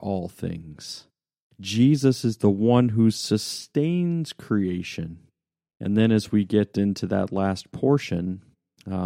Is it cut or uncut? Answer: uncut